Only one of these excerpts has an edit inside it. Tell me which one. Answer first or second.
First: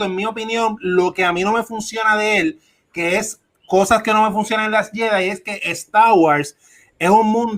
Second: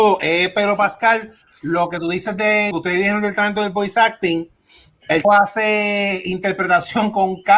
second